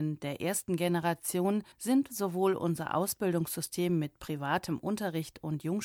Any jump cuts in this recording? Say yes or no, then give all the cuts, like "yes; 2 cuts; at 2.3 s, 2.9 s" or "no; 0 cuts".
yes; 1 cut; at 1.7 s